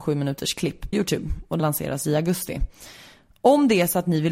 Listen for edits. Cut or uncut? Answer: cut